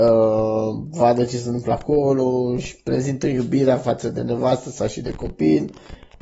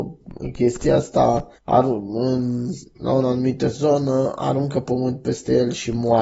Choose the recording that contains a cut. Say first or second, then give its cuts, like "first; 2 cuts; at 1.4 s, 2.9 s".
second; 1 cut; at 1.6 s